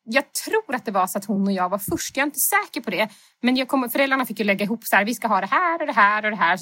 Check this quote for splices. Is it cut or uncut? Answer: uncut